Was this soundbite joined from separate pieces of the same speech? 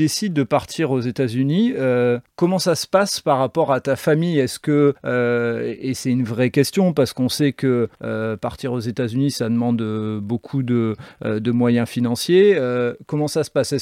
yes; 3 cuts; at 2.3 s, 5.0 s, 7.9 s

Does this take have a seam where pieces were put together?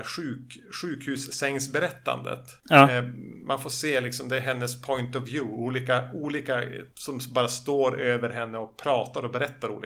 no; 0 cuts

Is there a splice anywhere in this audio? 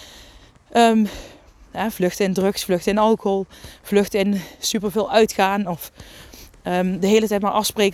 no; 0 cuts

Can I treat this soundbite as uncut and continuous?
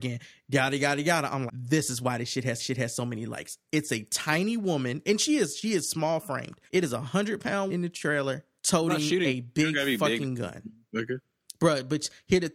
no; 5 cuts; at 1.5 s, 2.6 s, 6.7 s, 7.7 s, 8.6 s

